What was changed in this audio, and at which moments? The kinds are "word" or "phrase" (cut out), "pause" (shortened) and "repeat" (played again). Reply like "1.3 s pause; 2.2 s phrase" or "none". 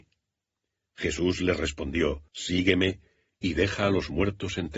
2.3 s pause